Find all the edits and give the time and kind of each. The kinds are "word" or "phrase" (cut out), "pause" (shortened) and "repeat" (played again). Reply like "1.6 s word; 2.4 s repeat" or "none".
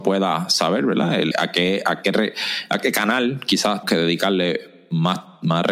1.3 s word; 3.8 s word

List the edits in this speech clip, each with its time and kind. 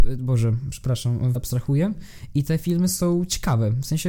1.4 s phrase

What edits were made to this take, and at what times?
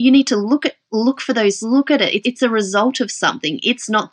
1.6 s word; 2.2 s word

